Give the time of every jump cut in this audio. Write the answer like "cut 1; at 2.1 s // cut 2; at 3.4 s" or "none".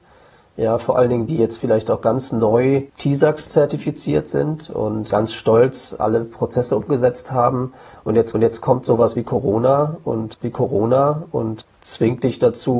cut 1; at 1.3 s // cut 2; at 2.9 s // cut 3; at 5.1 s // cut 4; at 8.3 s // cut 5; at 10.4 s